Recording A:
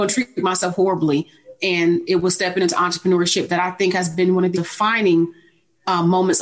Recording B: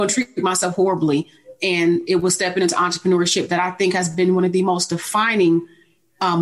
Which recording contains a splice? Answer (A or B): A